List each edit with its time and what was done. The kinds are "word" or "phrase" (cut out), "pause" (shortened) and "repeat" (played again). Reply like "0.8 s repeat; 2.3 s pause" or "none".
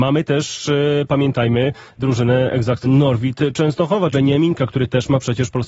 2.0 s word; 2.8 s word; 4.1 s word